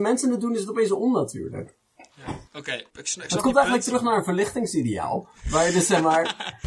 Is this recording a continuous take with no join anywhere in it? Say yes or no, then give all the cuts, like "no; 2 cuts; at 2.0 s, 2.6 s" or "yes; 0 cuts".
no; 2 cuts; at 2.5 s, 2.9 s